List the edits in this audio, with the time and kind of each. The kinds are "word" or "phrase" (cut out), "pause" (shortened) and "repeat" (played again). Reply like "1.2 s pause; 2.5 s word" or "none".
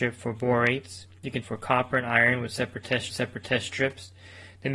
1.4 s word; 3.1 s repeat